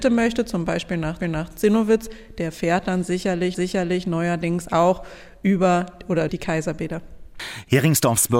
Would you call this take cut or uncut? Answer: cut